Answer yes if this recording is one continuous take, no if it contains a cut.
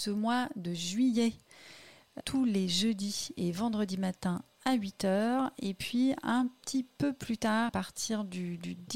no